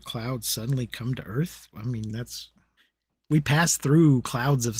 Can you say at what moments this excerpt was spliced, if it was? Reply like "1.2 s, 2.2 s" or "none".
none